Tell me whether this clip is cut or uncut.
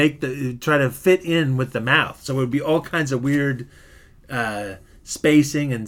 uncut